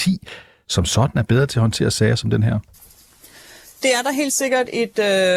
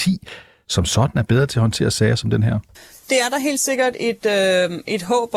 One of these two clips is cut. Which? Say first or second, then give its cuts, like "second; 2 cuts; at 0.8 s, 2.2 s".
second; 1 cut; at 2.8 s